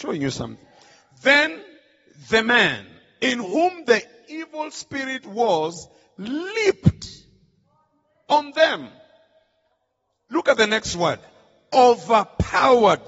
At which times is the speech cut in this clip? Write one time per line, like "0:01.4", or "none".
none